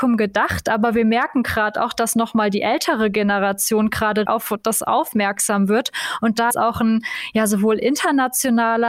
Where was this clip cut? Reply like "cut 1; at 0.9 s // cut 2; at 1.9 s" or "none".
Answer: cut 1; at 4.3 s // cut 2; at 6.5 s

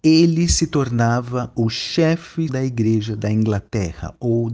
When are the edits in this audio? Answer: cut 1; at 2.5 s

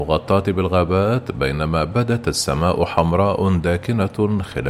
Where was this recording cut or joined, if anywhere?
none

